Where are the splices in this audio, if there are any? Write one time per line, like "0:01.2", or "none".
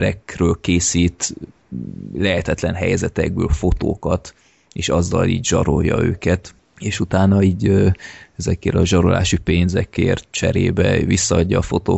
none

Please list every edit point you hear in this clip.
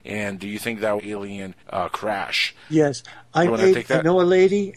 0:01.0
0:01.6
0:03.5

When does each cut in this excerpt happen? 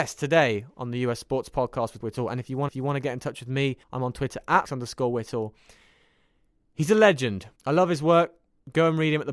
0:02.0
0:02.7
0:03.8
0:04.6
0:07.5

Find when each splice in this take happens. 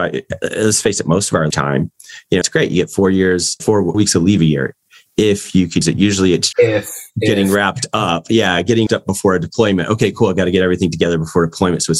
0:01.5
0:02.4
0:03.6
0:03.9
0:05.8
0:06.5
0:08.9

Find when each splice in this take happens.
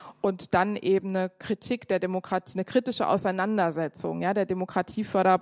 none

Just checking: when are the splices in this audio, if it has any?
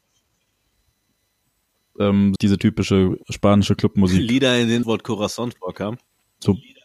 0:02.4
0:03.2
0:04.8

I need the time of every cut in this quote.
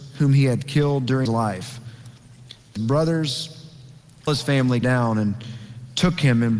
0:01.3
0:02.8
0:04.3
0:04.8

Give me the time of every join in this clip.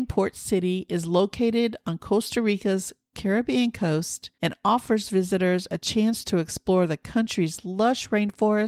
0:04.3

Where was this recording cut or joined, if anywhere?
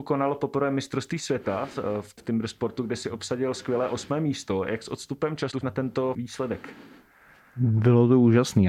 0:02.2
0:05.6
0:06.1

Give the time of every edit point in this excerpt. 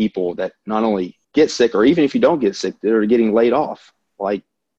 0:01.2

